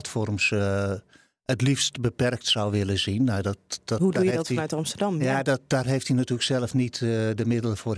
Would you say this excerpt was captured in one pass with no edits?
yes; 0 cuts

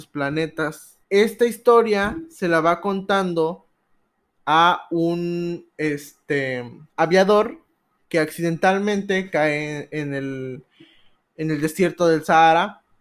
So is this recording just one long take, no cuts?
no; 1 cut; at 6.9 s

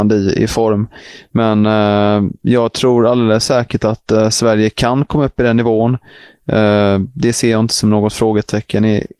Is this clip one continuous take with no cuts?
yes; 0 cuts

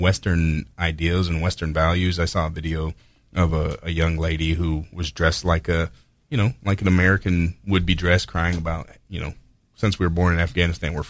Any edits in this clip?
no; 0 cuts

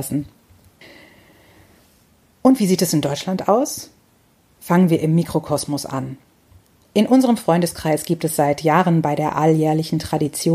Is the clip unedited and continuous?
yes; 0 cuts

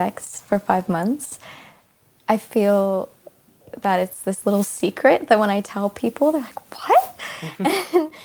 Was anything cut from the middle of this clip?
no; 0 cuts

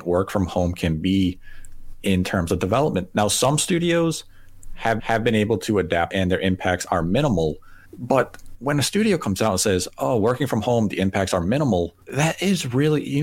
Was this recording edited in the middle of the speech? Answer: yes; 4 cuts; at 5.0 s, 6.1 s, 7.9 s, 12.0 s

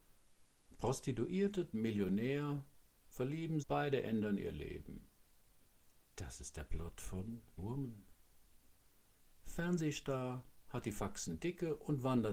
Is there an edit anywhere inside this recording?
yes; 4 cuts; at 1.7 s, 3.6 s, 6.0 s, 7.6 s

